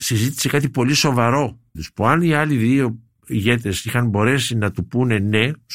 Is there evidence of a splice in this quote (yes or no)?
yes